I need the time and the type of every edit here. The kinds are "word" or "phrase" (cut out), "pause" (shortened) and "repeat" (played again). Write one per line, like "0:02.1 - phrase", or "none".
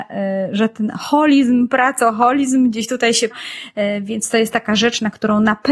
0:03.3 - word